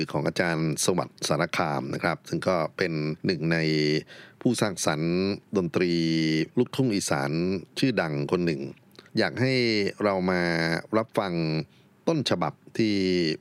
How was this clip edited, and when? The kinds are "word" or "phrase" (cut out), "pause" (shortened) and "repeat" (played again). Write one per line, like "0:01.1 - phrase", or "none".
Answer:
0:03.2 - pause
0:06.5 - pause
0:09.1 - pause